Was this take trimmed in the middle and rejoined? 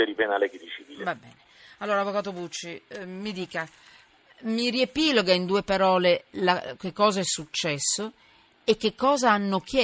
no; 0 cuts

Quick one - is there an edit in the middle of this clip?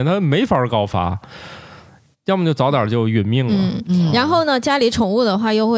no; 0 cuts

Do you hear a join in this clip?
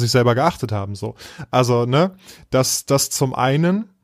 no; 0 cuts

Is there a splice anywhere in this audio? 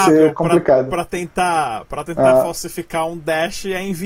no; 0 cuts

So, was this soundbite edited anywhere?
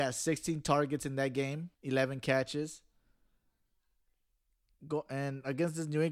yes; 1 cut; at 1.7 s

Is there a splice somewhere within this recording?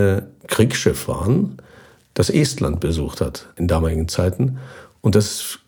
no; 0 cuts

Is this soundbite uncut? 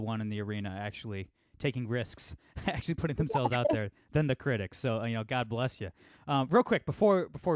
yes; 0 cuts

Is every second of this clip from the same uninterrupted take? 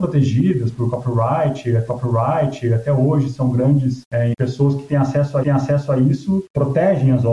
no; 3 cuts; at 1.9 s, 4.3 s, 5.4 s

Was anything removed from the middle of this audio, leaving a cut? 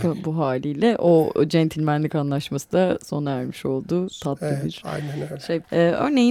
no; 0 cuts

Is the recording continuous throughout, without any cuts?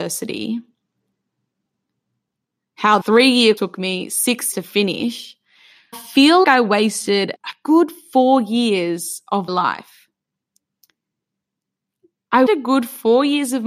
no; 8 cuts; at 3.0 s, 3.6 s, 4.5 s, 5.9 s, 6.4 s, 7.4 s, 9.5 s, 12.5 s

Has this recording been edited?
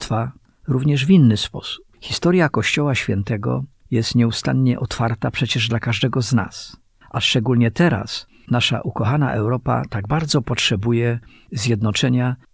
yes; 4 cuts; at 1.9 s, 3.8 s, 7.0 s, 8.5 s

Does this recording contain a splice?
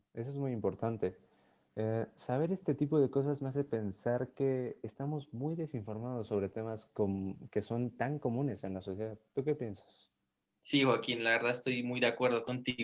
no; 0 cuts

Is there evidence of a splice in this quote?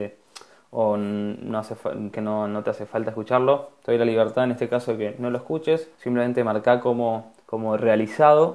yes; 3 cuts; at 2.1 s, 5.9 s, 7.4 s

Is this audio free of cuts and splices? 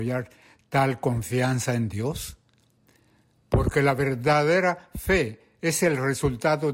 yes; 0 cuts

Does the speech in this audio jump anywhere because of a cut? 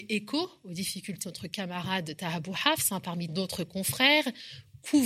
yes; 2 cuts; at 1.2 s, 3.3 s

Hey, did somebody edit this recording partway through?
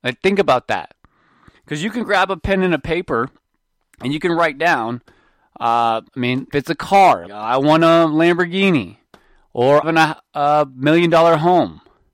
yes; 4 cuts; at 6.1 s, 6.5 s, 7.3 s, 9.8 s

